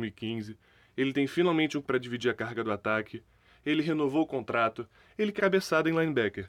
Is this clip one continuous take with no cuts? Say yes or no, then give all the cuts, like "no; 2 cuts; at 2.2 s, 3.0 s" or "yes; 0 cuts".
no; 2 cuts; at 1.8 s, 5.4 s